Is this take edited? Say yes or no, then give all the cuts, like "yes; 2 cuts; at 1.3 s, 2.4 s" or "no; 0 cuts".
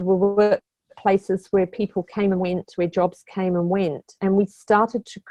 no; 0 cuts